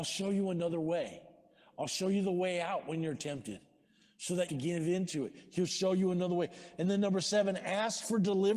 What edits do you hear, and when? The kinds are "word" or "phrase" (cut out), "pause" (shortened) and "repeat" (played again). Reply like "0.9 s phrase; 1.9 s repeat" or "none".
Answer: 4.5 s phrase